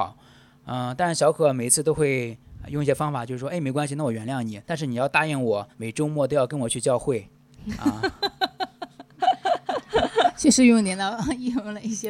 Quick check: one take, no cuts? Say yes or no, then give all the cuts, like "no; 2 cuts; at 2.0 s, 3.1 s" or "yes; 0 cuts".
no; 2 cuts; at 4.6 s, 5.7 s